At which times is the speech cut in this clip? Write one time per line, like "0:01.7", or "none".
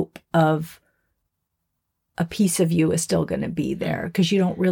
none